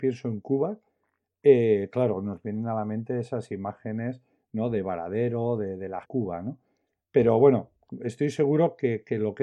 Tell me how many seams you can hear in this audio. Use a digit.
1